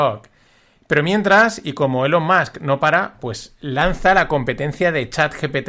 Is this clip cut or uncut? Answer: uncut